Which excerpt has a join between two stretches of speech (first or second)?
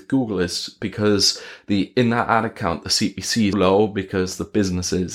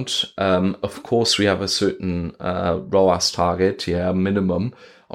first